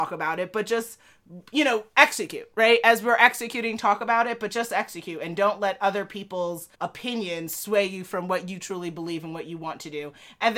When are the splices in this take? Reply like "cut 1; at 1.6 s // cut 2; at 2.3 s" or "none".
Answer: cut 1; at 6.7 s